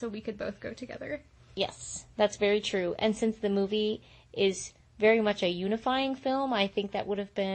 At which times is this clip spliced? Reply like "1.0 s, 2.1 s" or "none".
none